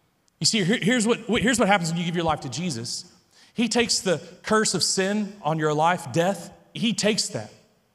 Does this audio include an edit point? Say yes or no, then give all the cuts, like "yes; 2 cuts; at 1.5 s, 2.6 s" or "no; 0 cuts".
yes; 1 cut; at 6.8 s